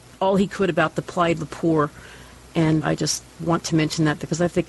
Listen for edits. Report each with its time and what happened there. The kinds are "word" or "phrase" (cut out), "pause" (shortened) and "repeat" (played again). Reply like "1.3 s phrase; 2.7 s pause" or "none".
1.4 s word; 2.8 s word